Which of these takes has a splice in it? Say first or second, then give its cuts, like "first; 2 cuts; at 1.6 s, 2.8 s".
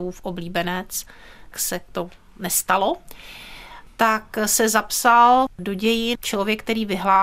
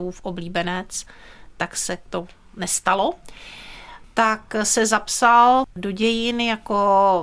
first; 2 cuts; at 1.5 s, 6.1 s